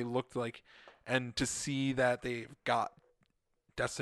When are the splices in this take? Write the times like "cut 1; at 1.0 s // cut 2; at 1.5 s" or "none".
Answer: none